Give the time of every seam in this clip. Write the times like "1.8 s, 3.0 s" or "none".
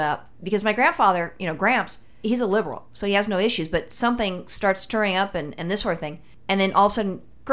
none